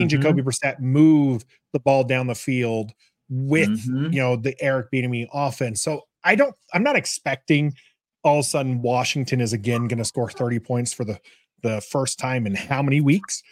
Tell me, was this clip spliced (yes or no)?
no